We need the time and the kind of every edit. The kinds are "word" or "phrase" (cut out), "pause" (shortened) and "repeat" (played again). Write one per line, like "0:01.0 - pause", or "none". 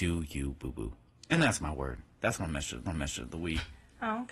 0:02.8 - repeat